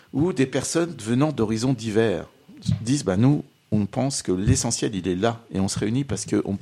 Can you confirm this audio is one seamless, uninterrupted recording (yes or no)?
yes